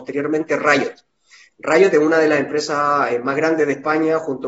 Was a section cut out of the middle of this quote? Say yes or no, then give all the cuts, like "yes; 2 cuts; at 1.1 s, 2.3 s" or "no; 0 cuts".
no; 0 cuts